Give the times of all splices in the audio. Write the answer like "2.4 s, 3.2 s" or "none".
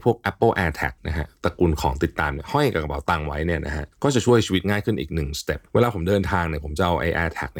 1.0 s, 3.9 s, 5.7 s